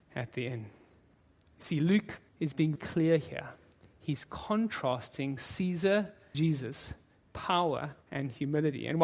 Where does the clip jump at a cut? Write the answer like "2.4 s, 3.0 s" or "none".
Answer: 2.3 s, 2.8 s, 6.3 s, 8.0 s